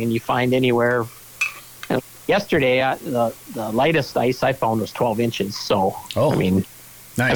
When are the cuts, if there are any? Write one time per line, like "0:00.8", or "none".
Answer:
none